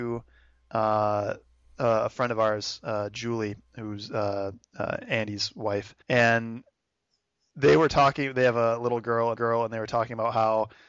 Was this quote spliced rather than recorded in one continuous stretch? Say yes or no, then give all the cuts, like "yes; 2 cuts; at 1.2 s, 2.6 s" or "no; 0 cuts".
yes; 2 cuts; at 6.0 s, 9.4 s